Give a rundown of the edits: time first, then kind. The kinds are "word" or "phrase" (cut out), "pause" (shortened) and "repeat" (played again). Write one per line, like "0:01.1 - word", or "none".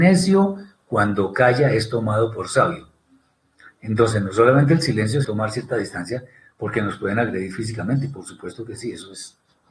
0:05.2 - word